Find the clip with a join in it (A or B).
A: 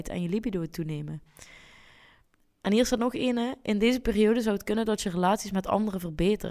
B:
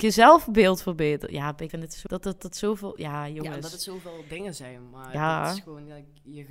B